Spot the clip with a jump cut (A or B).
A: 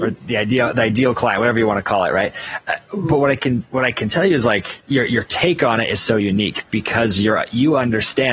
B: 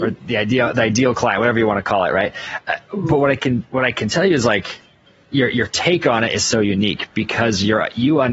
A